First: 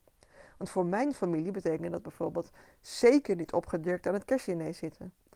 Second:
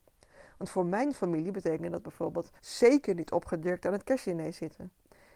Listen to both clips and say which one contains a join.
second; 1 cut; at 2.6 s

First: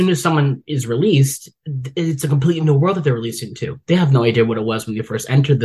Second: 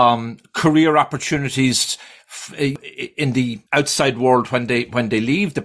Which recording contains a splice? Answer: second; 1 cut; at 3.7 s

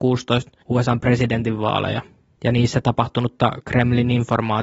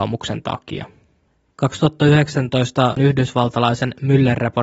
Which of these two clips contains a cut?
second; 1 cut; at 3.0 s

